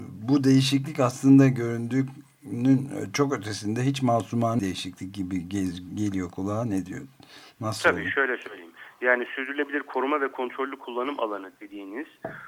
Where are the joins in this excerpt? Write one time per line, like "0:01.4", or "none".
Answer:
0:04.6